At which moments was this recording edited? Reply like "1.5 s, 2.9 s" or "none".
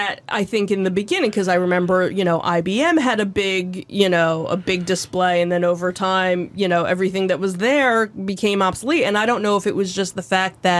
none